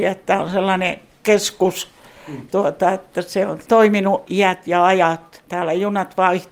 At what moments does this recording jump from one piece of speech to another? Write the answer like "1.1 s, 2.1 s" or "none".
2.5 s